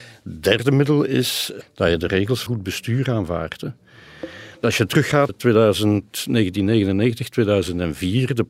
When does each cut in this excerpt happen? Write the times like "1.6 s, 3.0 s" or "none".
1.6 s, 2.5 s, 5.3 s